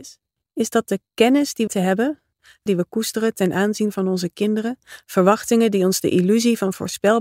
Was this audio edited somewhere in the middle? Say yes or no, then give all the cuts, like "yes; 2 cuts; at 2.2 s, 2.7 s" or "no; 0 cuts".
yes; 2 cuts; at 1.7 s, 2.7 s